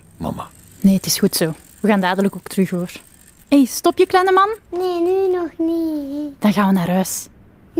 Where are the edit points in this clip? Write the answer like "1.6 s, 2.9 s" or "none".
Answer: 1.7 s, 3.3 s, 4.6 s